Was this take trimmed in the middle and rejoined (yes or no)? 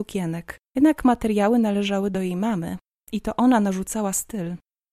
no